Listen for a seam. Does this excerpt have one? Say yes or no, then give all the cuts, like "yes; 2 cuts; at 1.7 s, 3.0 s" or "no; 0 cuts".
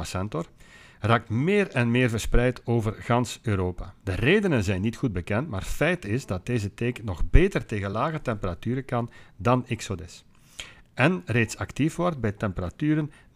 no; 0 cuts